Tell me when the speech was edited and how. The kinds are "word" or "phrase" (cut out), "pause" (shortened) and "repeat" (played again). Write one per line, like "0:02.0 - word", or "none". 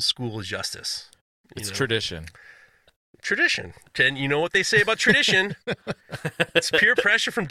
none